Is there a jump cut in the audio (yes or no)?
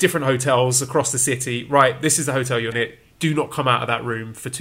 yes